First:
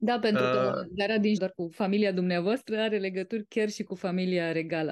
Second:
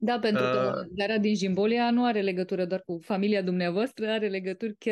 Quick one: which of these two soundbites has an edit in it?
first; 1 cut; at 1.4 s

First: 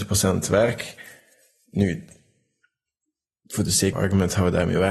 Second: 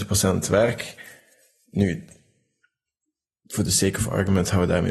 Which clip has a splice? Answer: first; 1 cut; at 3.9 s

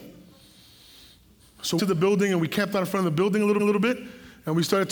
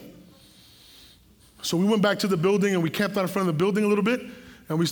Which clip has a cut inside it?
first; 2 cuts; at 1.8 s, 3.6 s

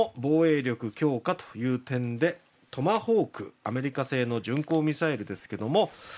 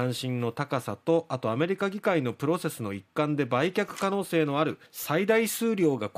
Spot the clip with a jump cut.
second; 1 cut; at 4.9 s

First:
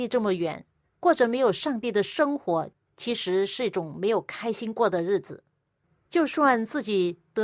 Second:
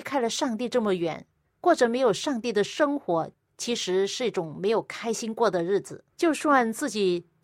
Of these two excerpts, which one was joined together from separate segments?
second; 1 cut; at 6.1 s

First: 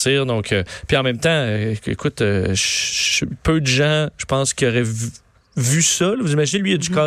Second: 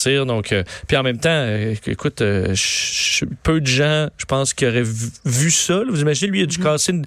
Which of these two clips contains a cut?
second; 1 cut; at 5.2 s

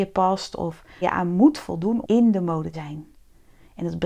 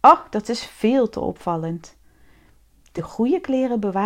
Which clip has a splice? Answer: first; 3 cuts; at 1.0 s, 2.0 s, 2.7 s

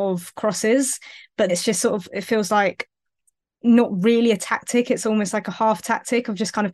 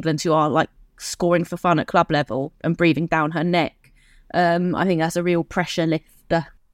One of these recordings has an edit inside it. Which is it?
first; 1 cut; at 1.5 s

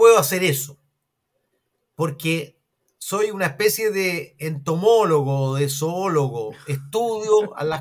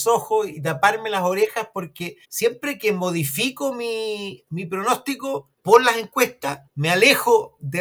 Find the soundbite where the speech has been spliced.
second; 3 cuts; at 2.2 s, 5.5 s, 6.7 s

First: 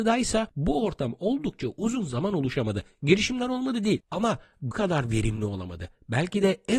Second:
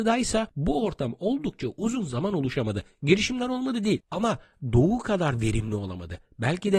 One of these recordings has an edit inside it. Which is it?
first; 1 cut; at 4.7 s

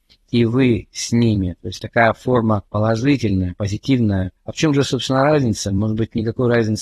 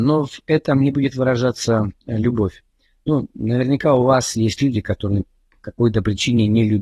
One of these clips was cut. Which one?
first; 2 cuts; at 2.7 s, 4.4 s

